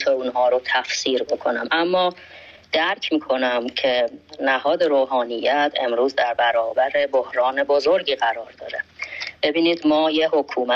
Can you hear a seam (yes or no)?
no